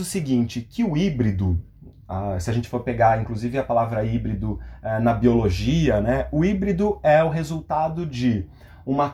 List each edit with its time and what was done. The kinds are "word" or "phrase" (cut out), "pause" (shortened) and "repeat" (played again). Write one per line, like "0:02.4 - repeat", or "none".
none